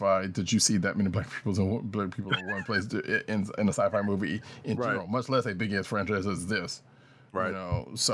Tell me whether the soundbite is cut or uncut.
uncut